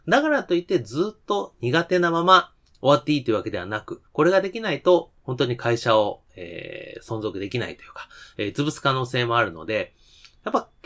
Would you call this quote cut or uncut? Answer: cut